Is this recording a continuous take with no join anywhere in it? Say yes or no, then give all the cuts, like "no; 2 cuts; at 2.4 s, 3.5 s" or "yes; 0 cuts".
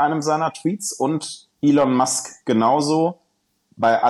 no; 1 cut; at 1.5 s